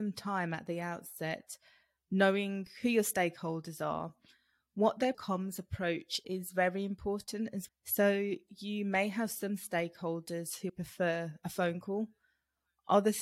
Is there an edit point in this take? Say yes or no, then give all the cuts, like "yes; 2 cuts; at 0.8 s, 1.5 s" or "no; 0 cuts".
yes; 4 cuts; at 5.1 s, 6.2 s, 7.7 s, 10.7 s